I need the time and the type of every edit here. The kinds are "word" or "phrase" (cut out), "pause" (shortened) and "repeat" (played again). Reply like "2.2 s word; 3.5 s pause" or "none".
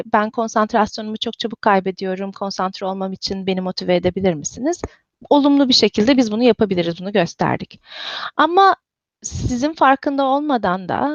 none